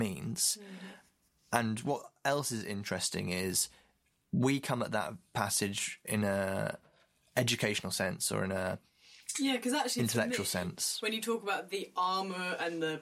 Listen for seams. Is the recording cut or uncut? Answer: uncut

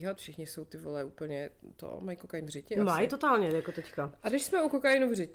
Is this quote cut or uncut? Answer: uncut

